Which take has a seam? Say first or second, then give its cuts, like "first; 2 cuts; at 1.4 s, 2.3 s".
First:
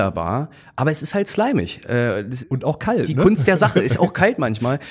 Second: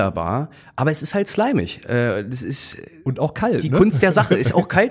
first; 1 cut; at 2.4 s